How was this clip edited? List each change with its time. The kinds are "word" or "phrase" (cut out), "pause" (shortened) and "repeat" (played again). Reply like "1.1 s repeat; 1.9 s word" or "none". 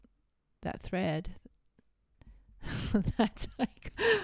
none

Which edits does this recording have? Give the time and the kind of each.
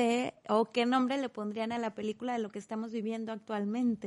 none

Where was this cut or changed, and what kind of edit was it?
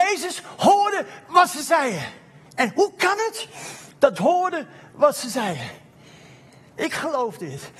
2.5 s pause; 4.2 s word

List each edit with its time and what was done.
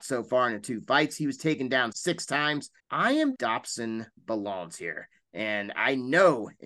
1.9 s word; 2.8 s pause; 3.3 s phrase

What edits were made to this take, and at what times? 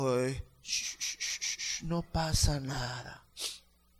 none

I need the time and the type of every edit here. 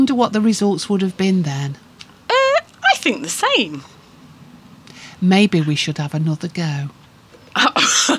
none

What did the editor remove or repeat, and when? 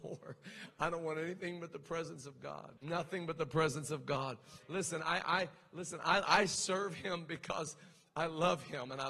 2.8 s pause

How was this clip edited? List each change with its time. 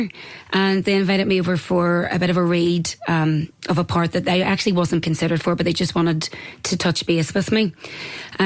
5.0 s word

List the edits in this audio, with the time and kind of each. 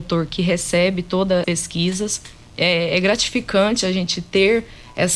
1.4 s word

